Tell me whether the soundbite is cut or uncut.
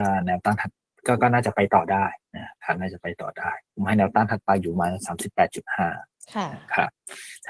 cut